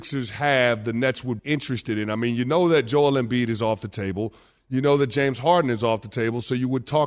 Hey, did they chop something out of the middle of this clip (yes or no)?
yes